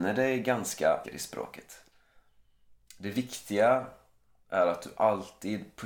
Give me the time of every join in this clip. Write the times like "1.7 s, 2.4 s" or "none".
1.0 s